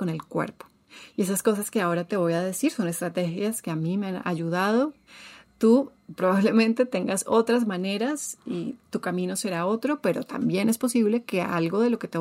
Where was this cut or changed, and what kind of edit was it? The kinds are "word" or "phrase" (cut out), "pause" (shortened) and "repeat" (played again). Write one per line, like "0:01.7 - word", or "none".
none